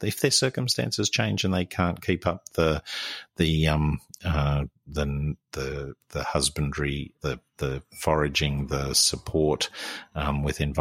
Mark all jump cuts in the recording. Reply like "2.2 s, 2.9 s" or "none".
7.2 s

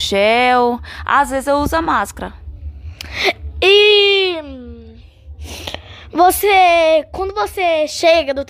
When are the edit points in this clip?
none

